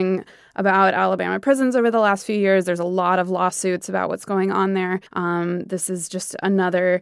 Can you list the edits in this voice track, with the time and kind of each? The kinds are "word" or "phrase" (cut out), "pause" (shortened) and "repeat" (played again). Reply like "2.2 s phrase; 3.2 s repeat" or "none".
5.1 s pause